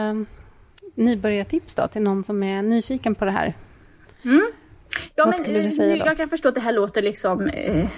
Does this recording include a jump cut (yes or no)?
no